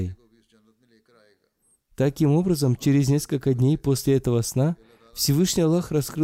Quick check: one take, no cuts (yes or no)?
yes